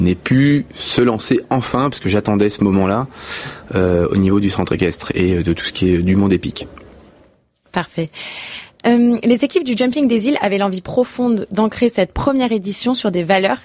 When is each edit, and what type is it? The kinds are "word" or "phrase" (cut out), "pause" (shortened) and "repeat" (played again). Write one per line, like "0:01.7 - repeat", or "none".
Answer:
none

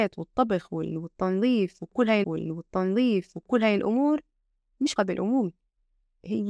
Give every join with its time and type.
0:02.2 - repeat
0:05.0 - word

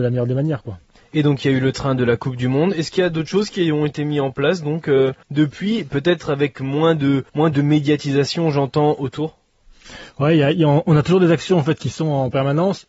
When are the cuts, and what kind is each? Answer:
0:05.2 - pause
0:07.3 - pause

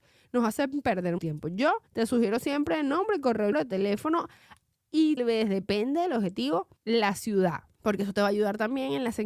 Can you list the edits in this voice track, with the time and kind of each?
0:01.2 - word
0:01.9 - pause
0:03.5 - word
0:05.2 - word
0:06.8 - pause
0:07.7 - pause

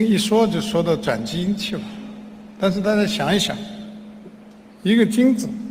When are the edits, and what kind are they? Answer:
none

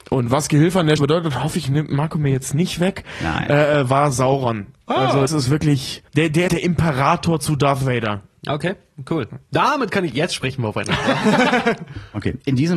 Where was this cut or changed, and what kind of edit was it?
0:01.0 - word
0:05.3 - word
0:06.1 - pause
0:06.5 - phrase
0:09.5 - pause

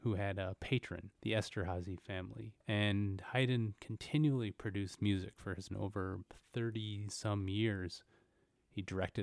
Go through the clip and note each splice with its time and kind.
0:01.1 - pause
0:02.6 - pause
0:05.7 - word

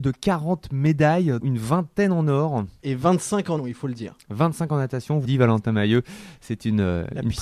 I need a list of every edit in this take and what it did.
0:01.4 - word
0:03.6 - word
0:05.2 - word

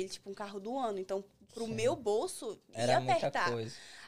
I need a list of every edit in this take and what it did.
none

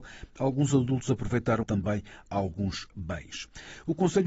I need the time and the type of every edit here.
0:01.6 - phrase

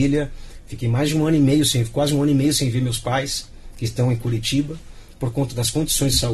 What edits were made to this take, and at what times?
none

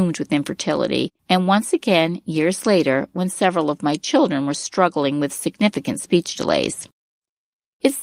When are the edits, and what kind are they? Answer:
0:01.2 - pause

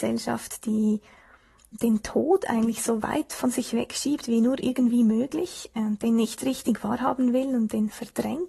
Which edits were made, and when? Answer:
none

